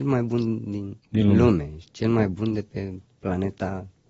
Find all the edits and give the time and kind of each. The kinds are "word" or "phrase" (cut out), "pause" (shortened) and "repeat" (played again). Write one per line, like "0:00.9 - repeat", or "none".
0:01.0 - pause